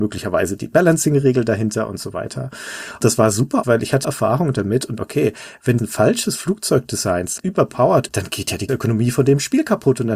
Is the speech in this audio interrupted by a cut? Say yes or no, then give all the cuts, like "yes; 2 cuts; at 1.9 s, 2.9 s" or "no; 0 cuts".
yes; 7 cuts; at 3.6 s, 4.0 s, 5.0 s, 5.8 s, 7.4 s, 8.1 s, 8.7 s